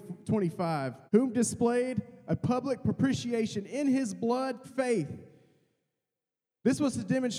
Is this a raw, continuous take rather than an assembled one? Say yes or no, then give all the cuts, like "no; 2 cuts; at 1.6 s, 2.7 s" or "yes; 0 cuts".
no; 2 cuts; at 1.1 s, 4.6 s